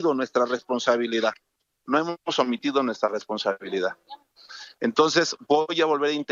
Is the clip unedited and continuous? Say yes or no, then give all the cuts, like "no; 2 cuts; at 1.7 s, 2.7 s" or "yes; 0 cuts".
yes; 0 cuts